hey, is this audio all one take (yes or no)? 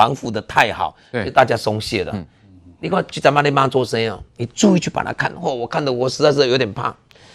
yes